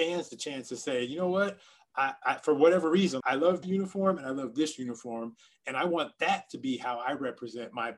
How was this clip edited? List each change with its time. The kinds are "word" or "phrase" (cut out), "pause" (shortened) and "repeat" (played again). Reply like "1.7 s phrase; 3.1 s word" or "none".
3.2 s word; 3.6 s word